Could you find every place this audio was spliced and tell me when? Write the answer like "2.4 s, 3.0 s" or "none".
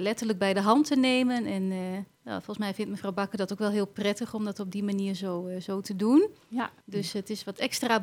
2.1 s, 6.8 s